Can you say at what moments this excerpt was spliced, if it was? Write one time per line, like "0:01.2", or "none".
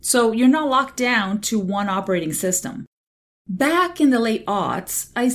none